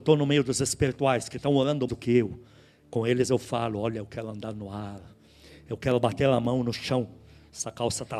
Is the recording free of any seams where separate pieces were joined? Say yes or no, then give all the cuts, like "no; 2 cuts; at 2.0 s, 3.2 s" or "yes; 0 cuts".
no; 1 cut; at 1.9 s